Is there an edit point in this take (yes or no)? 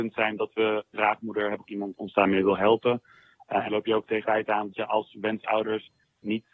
yes